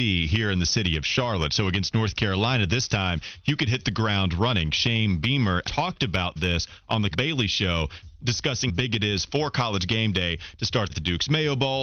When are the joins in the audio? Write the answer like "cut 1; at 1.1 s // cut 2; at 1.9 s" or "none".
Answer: cut 1; at 5.6 s // cut 2; at 7.1 s // cut 3; at 8.7 s // cut 4; at 10.9 s